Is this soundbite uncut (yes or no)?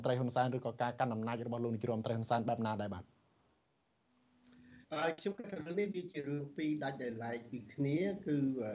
no